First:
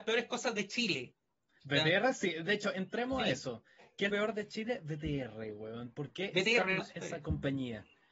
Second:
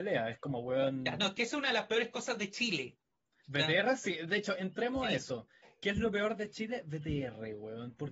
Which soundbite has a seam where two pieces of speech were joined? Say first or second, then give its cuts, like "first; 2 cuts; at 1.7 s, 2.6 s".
first; 2 cuts; at 4.1 s, 6.8 s